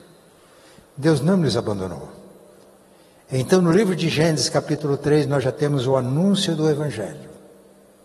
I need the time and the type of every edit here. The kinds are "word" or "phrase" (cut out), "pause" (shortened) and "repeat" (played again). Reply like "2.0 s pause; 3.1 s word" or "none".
none